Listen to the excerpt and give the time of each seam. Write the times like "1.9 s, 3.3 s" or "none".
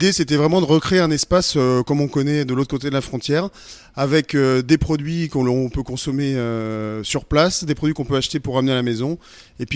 none